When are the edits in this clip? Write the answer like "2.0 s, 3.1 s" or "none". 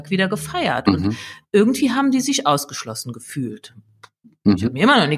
none